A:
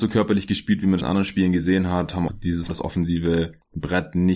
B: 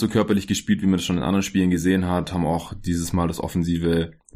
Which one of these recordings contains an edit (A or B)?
A